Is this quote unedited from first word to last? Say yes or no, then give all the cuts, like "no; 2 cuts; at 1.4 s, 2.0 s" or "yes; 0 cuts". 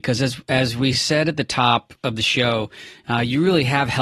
yes; 0 cuts